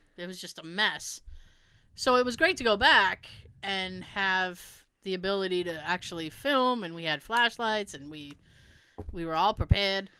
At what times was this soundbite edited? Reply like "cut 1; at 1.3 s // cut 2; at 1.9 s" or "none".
none

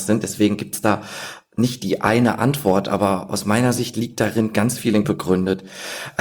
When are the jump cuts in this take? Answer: cut 1; at 5.0 s

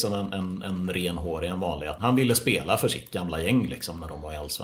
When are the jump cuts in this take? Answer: cut 1; at 2.0 s

